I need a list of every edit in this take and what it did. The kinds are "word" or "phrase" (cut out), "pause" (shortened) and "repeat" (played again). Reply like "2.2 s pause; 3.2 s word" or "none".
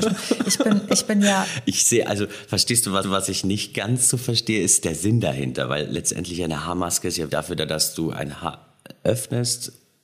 3.0 s repeat; 7.3 s word